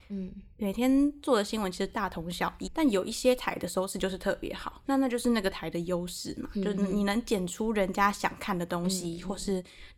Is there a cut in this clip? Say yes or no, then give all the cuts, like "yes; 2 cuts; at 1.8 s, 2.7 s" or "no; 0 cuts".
yes; 2 cuts; at 2.7 s, 4.8 s